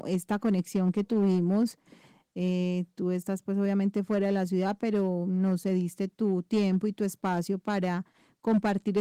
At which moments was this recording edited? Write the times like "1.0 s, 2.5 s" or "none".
none